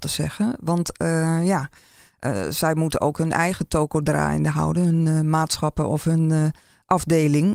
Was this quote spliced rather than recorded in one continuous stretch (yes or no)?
no